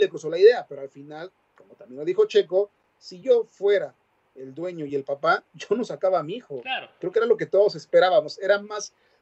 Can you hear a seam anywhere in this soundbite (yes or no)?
no